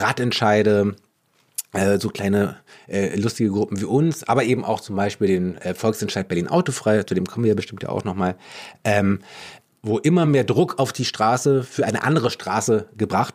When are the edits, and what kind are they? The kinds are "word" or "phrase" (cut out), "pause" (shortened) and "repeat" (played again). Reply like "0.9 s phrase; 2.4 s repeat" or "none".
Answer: none